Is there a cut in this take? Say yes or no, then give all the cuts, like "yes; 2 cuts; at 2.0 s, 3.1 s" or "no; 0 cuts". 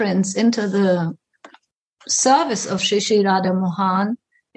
no; 0 cuts